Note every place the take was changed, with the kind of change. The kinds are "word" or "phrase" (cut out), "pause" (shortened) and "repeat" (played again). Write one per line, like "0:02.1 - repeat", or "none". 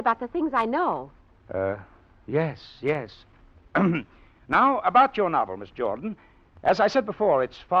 none